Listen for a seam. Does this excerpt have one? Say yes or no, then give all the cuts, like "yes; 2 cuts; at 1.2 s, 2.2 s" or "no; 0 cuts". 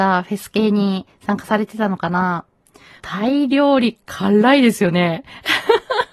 yes; 1 cut; at 3.0 s